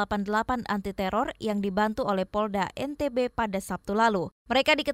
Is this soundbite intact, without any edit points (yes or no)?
yes